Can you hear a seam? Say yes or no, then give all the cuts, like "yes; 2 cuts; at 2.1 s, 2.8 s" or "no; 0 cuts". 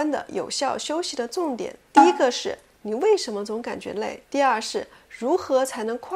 yes; 2 cuts; at 1.9 s, 4.2 s